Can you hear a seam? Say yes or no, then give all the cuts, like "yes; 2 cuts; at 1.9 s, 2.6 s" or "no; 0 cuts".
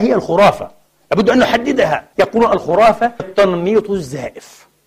yes; 2 cuts; at 2.1 s, 3.2 s